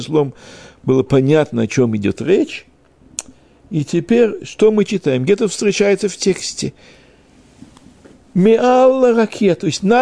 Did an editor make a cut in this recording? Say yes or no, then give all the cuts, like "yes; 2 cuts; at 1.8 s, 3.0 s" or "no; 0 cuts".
no; 0 cuts